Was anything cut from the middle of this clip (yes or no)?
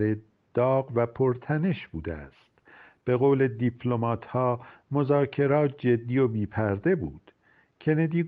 no